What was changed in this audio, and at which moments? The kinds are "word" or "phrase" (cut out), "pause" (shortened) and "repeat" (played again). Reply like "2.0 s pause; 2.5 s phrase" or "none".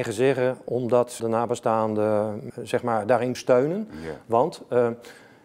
1.2 s word; 2.5 s word; 3.3 s word